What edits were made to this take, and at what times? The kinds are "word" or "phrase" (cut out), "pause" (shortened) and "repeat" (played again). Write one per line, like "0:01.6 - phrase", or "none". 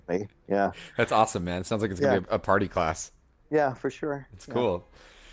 none